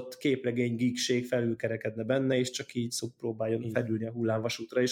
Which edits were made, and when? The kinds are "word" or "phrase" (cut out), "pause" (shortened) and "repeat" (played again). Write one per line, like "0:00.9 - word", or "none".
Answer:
none